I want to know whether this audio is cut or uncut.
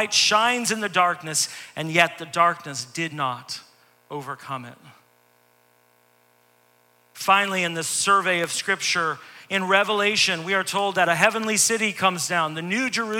uncut